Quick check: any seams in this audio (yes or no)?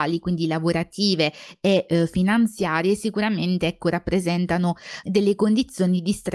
yes